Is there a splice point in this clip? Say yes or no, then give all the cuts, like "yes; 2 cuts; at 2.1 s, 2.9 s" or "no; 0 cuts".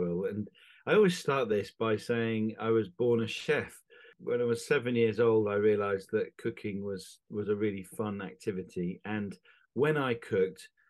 no; 0 cuts